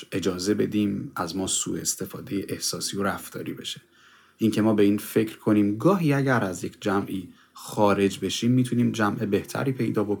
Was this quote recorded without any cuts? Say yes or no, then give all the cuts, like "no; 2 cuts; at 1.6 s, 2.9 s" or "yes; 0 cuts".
yes; 0 cuts